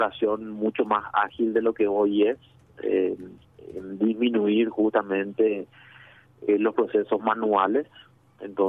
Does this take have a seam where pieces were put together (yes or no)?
no